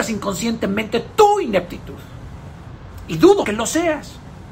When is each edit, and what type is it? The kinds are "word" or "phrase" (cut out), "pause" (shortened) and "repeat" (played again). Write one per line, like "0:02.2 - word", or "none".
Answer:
0:03.4 - word

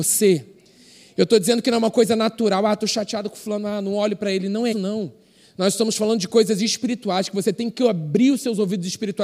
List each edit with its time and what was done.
0:04.7 - word

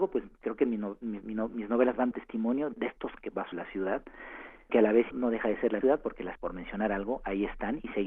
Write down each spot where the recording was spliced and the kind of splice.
0:01.2 - word
0:02.1 - word
0:02.7 - word
0:03.2 - word
0:03.5 - word
0:04.7 - word
0:05.1 - word
0:05.8 - word
0:06.4 - word

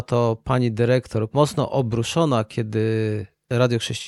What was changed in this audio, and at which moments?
0:01.3 - phrase

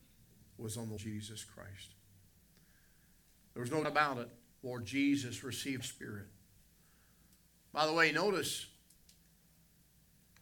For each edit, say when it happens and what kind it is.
0:01.0 - word
0:03.8 - word
0:05.8 - word

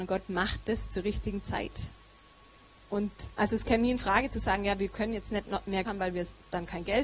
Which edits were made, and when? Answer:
0:03.4 - word
0:05.8 - word

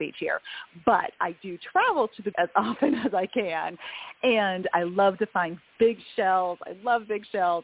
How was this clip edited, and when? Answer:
0:02.3 - word
0:04.7 - word

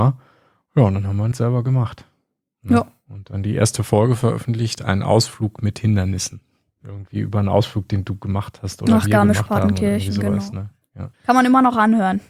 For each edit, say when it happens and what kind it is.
0:01.3 - word
0:11.1 - pause

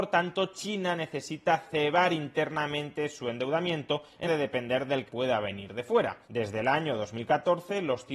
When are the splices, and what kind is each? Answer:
0:04.3 - word
0:05.1 - phrase
0:06.2 - pause

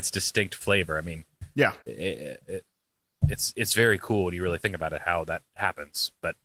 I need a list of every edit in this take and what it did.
0:01.8 - pause

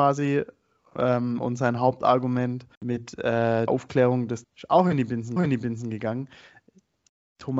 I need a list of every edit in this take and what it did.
0:02.7 - pause
0:03.7 - word
0:04.4 - word
0:05.4 - repeat

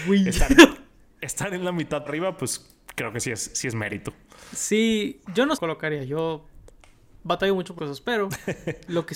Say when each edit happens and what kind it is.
0:02.1 - word
0:05.2 - pause
0:05.6 - phrase
0:07.8 - word

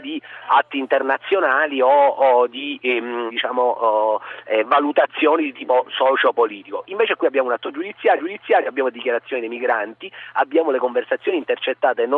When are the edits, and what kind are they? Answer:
0:03.3 - word
0:08.2 - repeat

